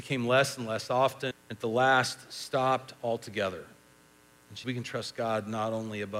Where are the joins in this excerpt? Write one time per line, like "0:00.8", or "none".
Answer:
0:01.3
0:04.6